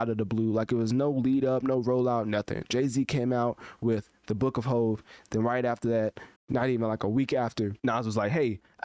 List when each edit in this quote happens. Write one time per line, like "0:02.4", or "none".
0:06.4
0:07.8